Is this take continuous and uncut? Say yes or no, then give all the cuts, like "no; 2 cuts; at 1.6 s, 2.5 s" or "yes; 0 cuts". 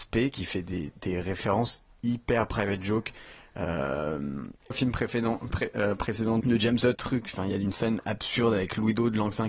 no; 3 cuts; at 4.7 s, 6.4 s, 6.9 s